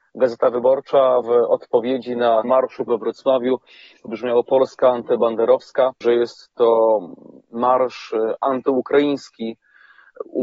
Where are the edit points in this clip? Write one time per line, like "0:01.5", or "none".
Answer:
0:01.2
0:02.4
0:02.9
0:04.1
0:06.0

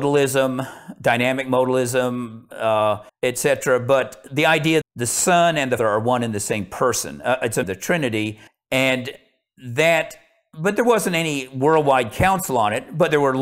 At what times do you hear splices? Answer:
0:03.1
0:04.8
0:05.8
0:07.6
0:08.5

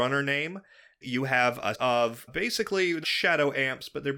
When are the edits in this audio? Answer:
0:01.0
0:01.7
0:02.3
0:03.0

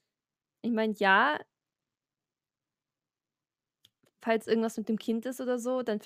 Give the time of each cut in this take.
none

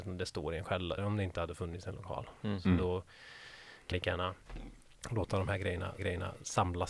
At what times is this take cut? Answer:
0:01.0
0:03.9
0:06.0

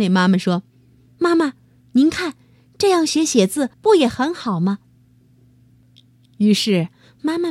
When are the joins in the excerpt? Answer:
0:03.7

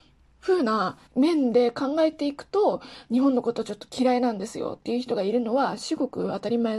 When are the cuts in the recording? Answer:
0:01.1

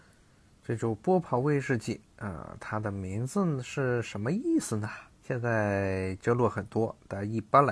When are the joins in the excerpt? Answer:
0:05.1

